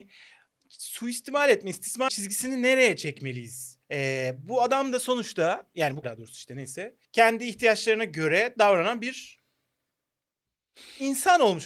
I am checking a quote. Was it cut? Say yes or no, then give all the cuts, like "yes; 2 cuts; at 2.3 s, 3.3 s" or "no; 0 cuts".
yes; 4 cuts; at 2.1 s, 3.8 s, 6.0 s, 7.0 s